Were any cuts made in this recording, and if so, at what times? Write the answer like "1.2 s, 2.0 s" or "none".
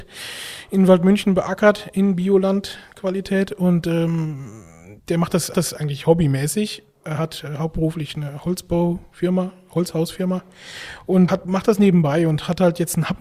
5.0 s, 5.5 s, 11.3 s